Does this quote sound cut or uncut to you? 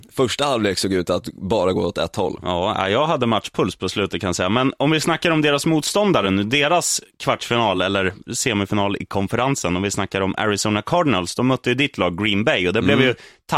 uncut